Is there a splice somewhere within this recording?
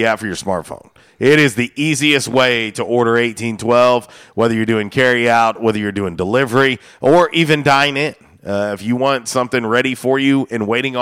no; 0 cuts

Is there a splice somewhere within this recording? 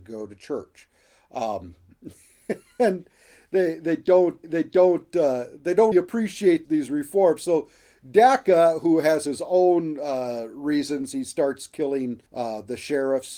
yes; 4 cuts; at 4.4 s, 5.9 s, 6.6 s, 12.3 s

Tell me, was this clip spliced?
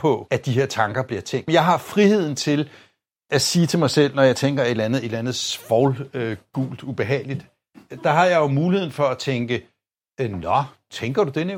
no; 0 cuts

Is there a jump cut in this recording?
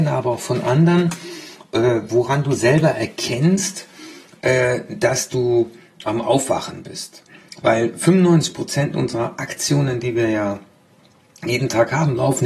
no; 0 cuts

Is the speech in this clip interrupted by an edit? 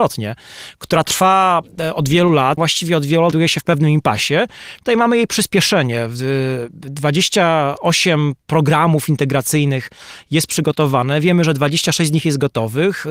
yes; 2 cuts; at 2.6 s, 3.3 s

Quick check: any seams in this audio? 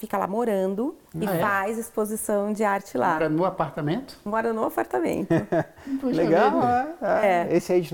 yes; 1 cut; at 1.1 s

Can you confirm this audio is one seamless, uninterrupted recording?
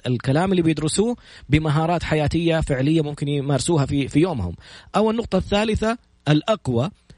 yes; 0 cuts

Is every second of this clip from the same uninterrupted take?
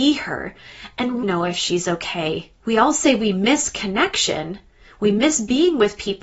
no; 2 cuts; at 1.2 s, 2.6 s

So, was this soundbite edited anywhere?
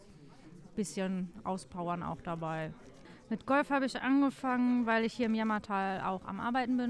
no; 0 cuts

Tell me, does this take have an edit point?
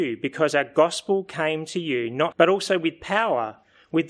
yes; 1 cut; at 2.3 s

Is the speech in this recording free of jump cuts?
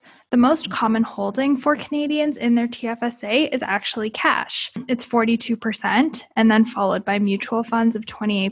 yes; 0 cuts

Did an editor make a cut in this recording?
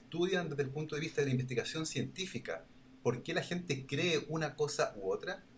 no; 0 cuts

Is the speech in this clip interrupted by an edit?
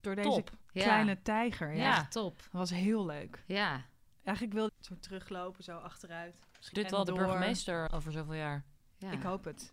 yes; 3 cuts; at 4.7 s, 6.7 s, 7.9 s

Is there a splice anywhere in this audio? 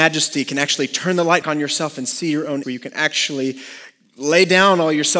yes; 2 cuts; at 1.4 s, 2.6 s

